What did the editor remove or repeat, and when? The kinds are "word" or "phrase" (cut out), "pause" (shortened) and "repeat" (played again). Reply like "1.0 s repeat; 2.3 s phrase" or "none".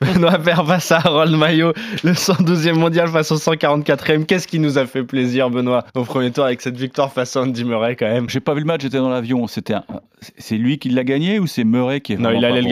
5.9 s pause; 8.3 s word